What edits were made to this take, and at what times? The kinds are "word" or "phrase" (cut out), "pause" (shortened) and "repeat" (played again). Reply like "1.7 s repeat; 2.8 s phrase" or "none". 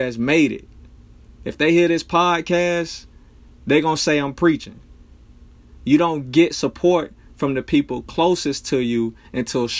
none